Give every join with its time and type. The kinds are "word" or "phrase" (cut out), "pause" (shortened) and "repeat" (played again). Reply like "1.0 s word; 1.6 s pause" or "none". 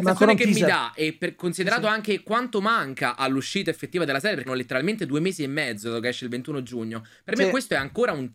4.5 s word